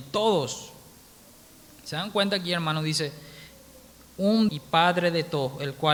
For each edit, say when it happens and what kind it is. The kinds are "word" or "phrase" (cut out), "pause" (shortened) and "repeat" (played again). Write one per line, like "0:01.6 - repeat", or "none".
0:04.5 - word